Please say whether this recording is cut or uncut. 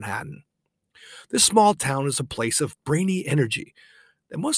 uncut